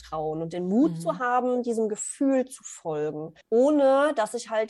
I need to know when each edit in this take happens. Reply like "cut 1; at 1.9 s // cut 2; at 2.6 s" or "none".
cut 1; at 3.4 s